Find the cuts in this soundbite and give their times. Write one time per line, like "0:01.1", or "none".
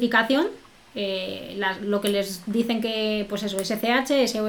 none